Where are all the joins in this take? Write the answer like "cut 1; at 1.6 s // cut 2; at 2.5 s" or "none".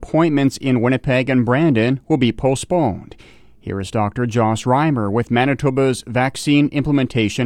none